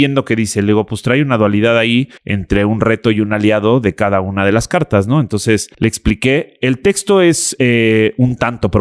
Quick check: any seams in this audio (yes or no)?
yes